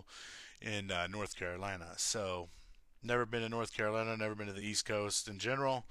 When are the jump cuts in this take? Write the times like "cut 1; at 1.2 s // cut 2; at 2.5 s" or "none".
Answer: none